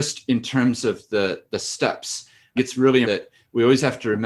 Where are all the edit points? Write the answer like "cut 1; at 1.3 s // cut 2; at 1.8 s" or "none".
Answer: cut 1; at 2.6 s // cut 2; at 3.0 s

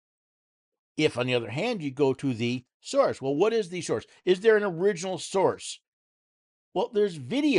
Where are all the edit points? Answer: none

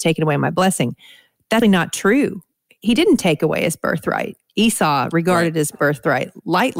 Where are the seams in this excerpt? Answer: cut 1; at 1.6 s

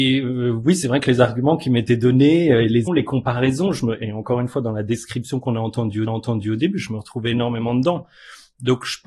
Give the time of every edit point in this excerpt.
cut 1; at 2.9 s // cut 2; at 6.1 s

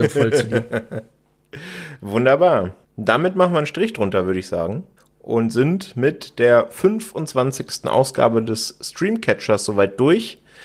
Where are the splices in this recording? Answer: cut 1; at 2.8 s // cut 2; at 5.0 s

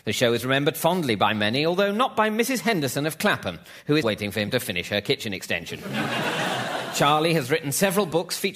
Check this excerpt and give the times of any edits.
cut 1; at 4.0 s

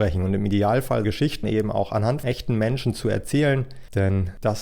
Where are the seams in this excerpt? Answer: cut 1; at 1.0 s // cut 2; at 1.4 s // cut 3; at 2.2 s

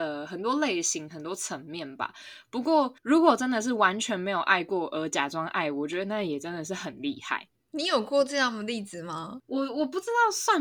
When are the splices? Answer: cut 1; at 3.0 s

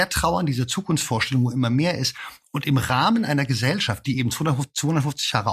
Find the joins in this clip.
none

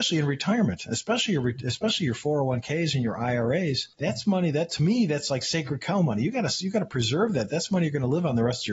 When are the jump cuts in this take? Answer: cut 1; at 3.9 s

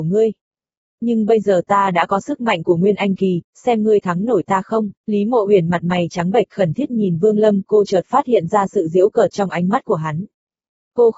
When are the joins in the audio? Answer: cut 1; at 5.0 s

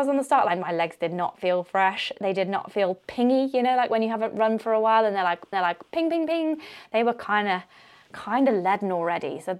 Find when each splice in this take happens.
cut 1; at 5.5 s

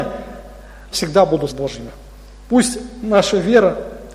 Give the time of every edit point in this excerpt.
cut 1; at 0.9 s // cut 2; at 1.5 s

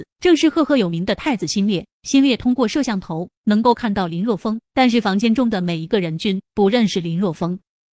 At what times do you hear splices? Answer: cut 1; at 1.9 s

